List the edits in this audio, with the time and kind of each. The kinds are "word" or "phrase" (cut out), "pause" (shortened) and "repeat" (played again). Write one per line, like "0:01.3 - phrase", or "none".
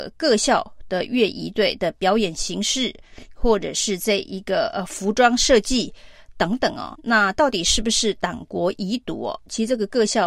0:07.0 - word